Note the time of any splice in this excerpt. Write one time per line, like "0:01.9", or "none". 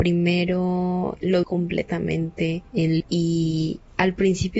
0:01.4
0:03.0